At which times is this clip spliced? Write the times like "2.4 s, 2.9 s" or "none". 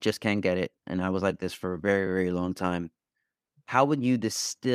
none